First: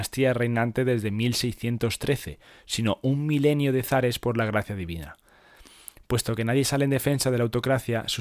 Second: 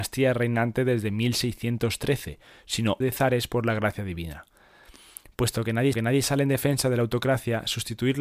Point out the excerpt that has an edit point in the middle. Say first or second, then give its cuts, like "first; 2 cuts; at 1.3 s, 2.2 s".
second; 2 cuts; at 3.0 s, 5.9 s